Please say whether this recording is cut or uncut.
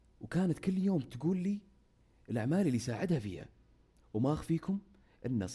uncut